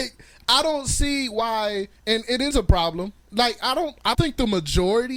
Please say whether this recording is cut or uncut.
cut